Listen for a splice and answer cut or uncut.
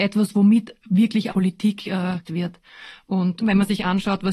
cut